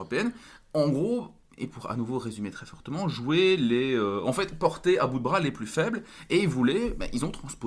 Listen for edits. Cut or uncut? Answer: uncut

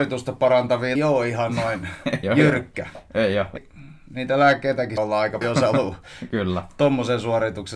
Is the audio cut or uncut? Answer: cut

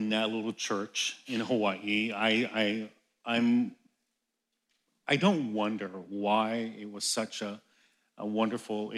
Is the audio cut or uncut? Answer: uncut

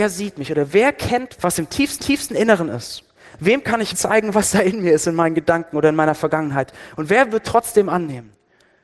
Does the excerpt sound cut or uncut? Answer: cut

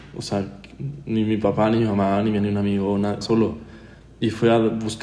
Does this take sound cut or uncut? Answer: cut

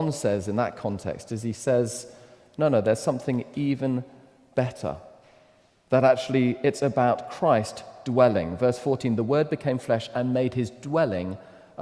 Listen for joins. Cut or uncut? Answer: uncut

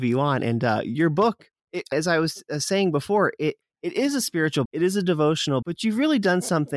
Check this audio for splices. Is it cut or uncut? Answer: cut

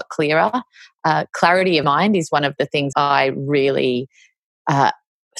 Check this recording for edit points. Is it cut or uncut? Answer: cut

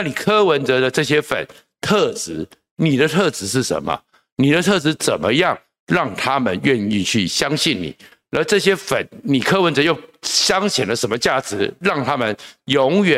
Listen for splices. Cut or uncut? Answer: uncut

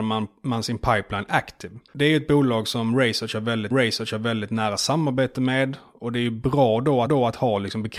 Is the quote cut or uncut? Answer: cut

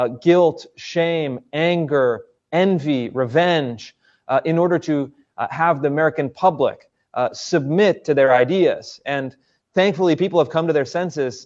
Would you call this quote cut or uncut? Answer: uncut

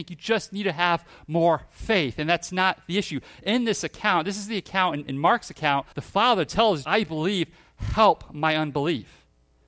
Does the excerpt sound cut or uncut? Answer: cut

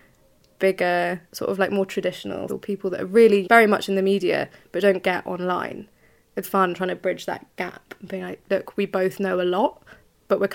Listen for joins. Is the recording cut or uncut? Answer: cut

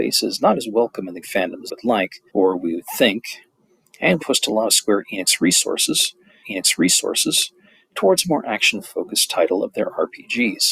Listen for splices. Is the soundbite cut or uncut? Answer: cut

